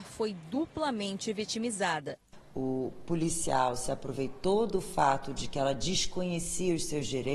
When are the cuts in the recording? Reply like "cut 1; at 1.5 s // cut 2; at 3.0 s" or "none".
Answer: none